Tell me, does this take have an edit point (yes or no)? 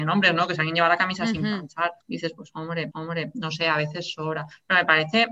yes